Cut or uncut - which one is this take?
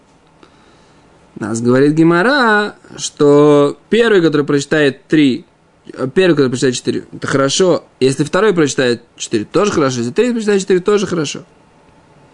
cut